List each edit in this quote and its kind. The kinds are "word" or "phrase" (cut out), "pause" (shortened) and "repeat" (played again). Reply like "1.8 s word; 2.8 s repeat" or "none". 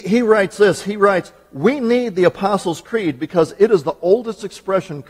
none